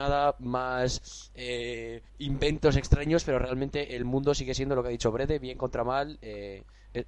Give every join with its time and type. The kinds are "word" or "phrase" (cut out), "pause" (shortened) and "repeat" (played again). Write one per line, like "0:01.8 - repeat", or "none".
0:02.1 - pause